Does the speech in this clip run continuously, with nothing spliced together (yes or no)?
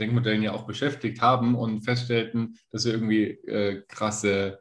yes